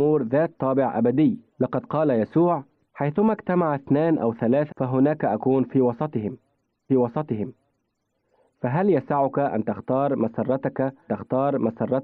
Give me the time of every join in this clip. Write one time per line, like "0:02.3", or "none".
0:01.5
0:02.8
0:04.7
0:06.9
0:11.1